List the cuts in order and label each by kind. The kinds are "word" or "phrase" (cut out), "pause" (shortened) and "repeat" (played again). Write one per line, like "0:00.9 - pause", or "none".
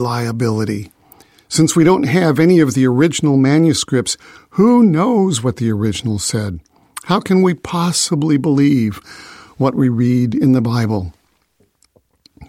none

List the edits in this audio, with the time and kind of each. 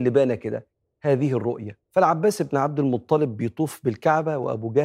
0:01.8 - pause

